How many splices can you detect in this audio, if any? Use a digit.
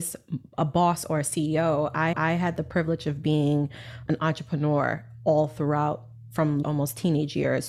3